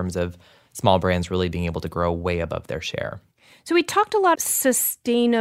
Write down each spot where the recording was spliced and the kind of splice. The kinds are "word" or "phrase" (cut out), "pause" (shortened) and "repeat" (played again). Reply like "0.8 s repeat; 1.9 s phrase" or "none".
4.3 s word